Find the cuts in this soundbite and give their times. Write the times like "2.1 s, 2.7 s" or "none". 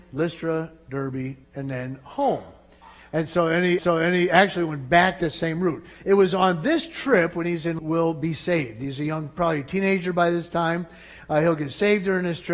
1.4 s, 3.8 s, 7.8 s

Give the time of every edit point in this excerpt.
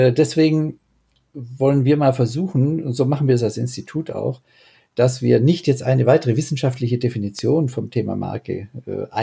none

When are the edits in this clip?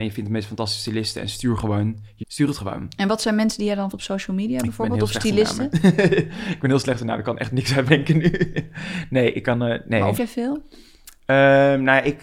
2.2 s, 3.9 s, 7.9 s, 10.2 s

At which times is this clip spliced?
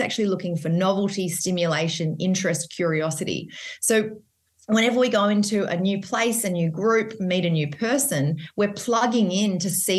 none

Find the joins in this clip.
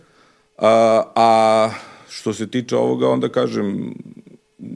none

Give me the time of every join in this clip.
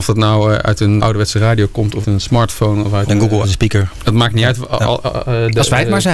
1.0 s, 2.0 s, 3.1 s, 3.4 s

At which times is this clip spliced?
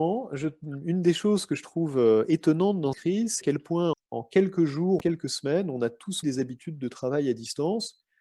2.9 s, 3.4 s, 3.9 s, 5.0 s, 6.2 s

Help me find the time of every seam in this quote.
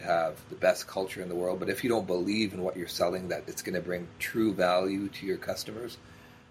none

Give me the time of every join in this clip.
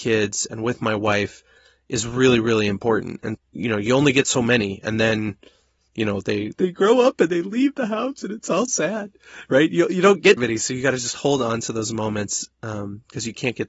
3.3 s, 6.5 s, 8.7 s, 10.4 s

